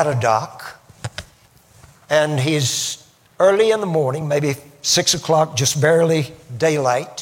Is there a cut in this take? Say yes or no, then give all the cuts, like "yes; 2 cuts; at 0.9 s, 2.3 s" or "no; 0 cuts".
no; 0 cuts